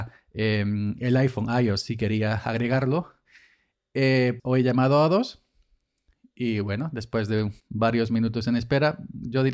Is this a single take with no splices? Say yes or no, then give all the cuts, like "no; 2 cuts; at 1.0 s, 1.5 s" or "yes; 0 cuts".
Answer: no; 2 cuts; at 4.4 s, 7.6 s